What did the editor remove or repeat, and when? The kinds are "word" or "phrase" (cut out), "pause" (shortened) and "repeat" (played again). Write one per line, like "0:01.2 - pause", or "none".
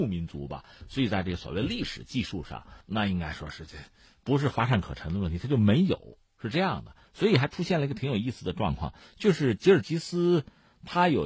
0:02.8 - pause